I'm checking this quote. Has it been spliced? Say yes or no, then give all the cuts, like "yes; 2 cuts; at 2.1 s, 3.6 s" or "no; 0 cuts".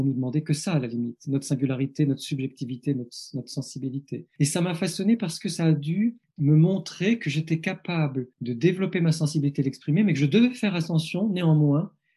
yes; 1 cut; at 8.3 s